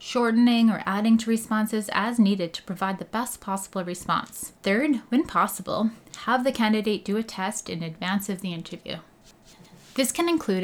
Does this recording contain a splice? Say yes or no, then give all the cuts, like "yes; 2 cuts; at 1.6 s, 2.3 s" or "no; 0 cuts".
yes; 1 cut; at 4.6 s